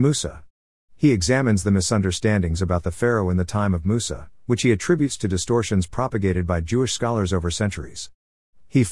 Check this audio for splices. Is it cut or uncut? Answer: uncut